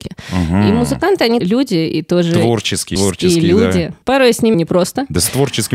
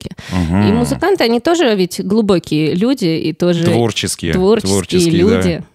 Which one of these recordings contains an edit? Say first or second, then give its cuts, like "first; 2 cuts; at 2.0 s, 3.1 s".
first; 4 cuts; at 1.4 s, 3.0 s, 4.0 s, 4.5 s